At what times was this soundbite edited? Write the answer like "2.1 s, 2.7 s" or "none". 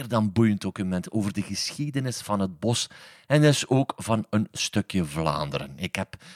none

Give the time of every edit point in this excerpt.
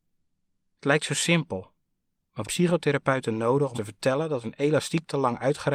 2.4 s, 3.7 s, 4.4 s

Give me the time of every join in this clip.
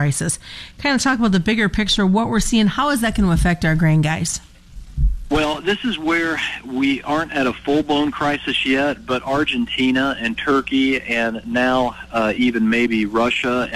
none

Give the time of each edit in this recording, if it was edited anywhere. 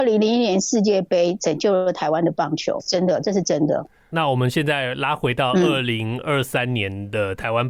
2.8 s

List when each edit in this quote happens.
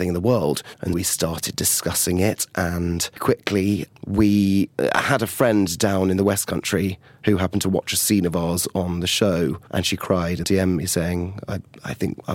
0.9 s, 3.2 s, 10.4 s

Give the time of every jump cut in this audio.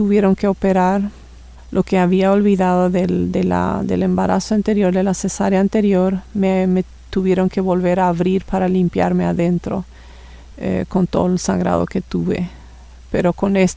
none

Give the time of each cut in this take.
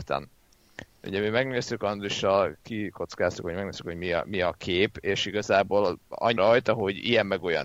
6.4 s

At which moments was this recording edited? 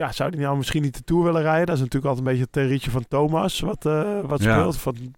none

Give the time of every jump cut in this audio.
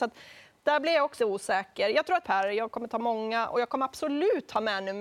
1.2 s, 2.2 s

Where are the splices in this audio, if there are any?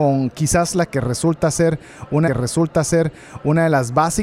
2.3 s

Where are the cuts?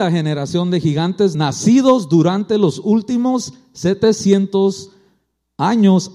1.3 s

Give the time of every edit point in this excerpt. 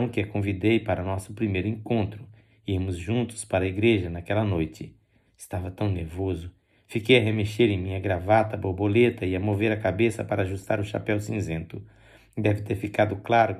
none

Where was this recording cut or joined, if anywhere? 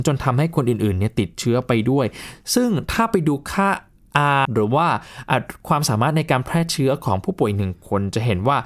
4.4 s

